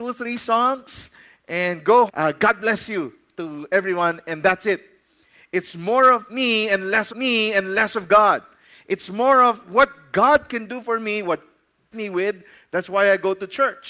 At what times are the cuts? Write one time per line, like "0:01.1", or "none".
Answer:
0:02.1
0:07.1
0:11.9